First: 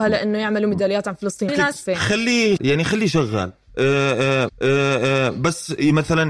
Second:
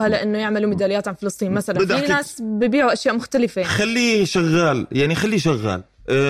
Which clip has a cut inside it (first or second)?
first